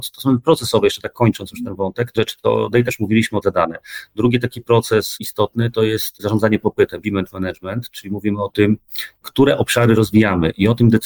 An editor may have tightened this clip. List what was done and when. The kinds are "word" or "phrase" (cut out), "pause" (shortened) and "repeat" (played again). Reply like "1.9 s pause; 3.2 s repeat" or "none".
2.2 s phrase; 2.9 s word; 3.4 s phrase; 7.0 s word